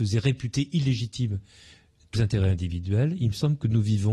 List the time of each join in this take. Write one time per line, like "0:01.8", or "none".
0:02.2